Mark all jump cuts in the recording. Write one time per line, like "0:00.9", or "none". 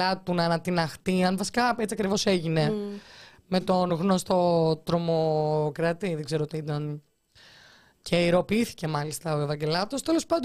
none